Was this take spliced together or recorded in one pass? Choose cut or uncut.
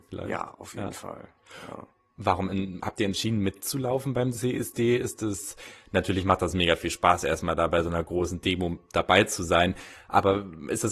uncut